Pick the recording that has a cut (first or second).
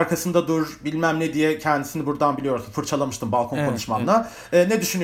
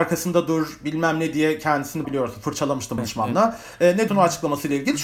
second